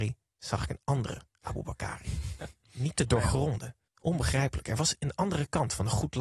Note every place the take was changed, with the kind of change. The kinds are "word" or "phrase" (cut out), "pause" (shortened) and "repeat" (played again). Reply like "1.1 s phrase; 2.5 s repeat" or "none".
3.9 s pause